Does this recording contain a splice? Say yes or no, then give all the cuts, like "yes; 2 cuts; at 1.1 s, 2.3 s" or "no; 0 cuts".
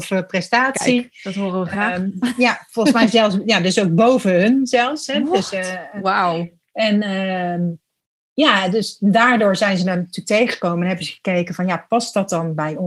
no; 0 cuts